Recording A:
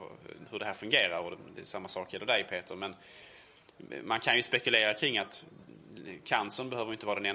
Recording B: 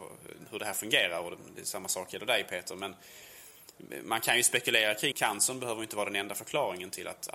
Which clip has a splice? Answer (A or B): B